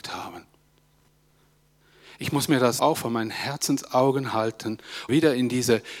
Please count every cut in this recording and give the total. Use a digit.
2